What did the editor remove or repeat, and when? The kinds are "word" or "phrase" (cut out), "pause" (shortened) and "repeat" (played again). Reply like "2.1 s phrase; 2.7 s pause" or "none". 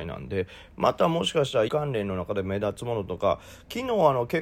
1.7 s word